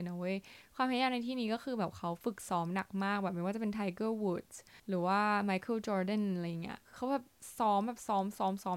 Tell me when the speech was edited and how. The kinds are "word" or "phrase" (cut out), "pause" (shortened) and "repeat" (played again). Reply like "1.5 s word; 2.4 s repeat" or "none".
4.8 s pause; 6.8 s pause